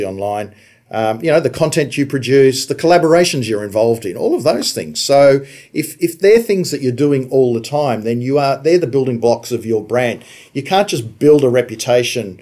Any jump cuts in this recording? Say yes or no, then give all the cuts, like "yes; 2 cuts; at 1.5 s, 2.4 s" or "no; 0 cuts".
no; 0 cuts